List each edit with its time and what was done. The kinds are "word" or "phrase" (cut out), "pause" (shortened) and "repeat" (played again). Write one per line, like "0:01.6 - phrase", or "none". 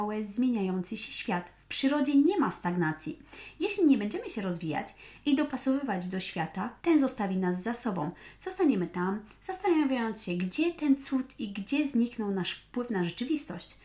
0:06.8 - pause